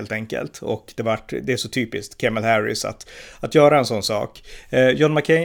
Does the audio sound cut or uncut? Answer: uncut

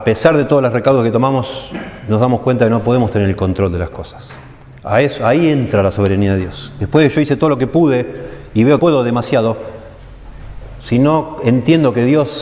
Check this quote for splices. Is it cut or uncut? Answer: cut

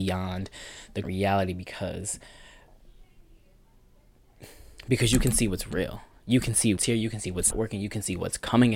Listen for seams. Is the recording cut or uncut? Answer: cut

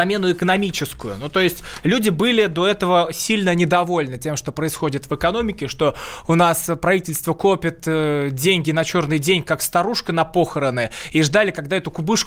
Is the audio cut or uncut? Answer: uncut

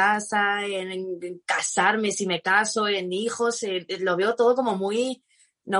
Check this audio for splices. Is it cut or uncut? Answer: uncut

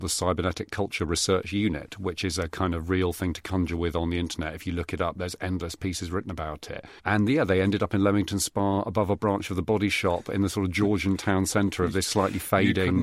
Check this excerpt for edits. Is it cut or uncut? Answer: cut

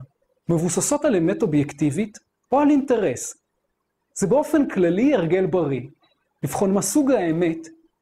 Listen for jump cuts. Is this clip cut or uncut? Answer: uncut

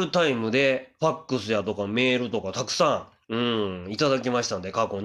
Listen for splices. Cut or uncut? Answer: cut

